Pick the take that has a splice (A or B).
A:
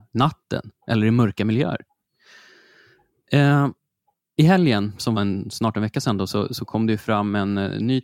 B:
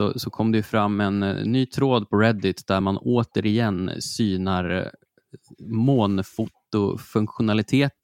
A